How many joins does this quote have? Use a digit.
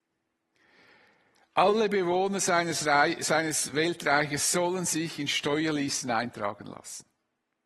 0